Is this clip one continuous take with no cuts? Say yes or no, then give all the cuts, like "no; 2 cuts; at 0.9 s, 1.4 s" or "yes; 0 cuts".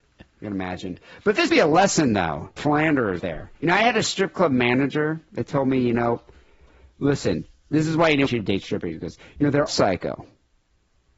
no; 6 cuts; at 1.5 s, 2.6 s, 3.2 s, 3.5 s, 8.3 s, 9.7 s